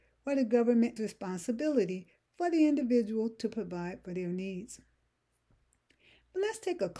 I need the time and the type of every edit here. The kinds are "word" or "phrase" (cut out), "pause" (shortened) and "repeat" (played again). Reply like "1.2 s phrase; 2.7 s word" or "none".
1.0 s word